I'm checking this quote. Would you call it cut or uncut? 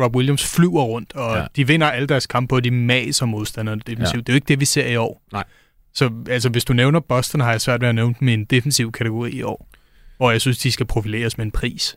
uncut